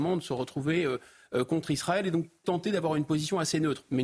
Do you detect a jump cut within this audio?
yes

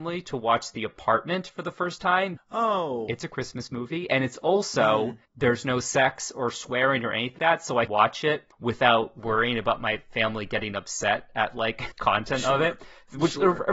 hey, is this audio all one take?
no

